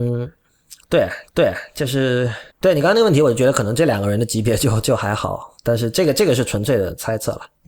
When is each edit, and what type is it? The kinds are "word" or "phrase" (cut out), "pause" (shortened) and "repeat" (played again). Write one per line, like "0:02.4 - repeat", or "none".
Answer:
0:01.3 - repeat
0:02.5 - pause
0:05.6 - pause